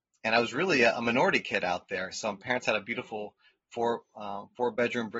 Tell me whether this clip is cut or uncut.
uncut